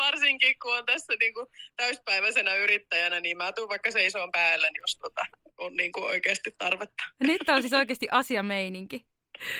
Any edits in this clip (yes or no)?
no